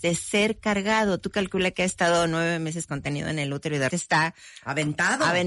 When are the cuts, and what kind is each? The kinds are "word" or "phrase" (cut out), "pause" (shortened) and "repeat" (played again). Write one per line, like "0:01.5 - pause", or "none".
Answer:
0:03.9 - word